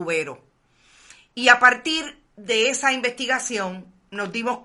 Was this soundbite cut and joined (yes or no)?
yes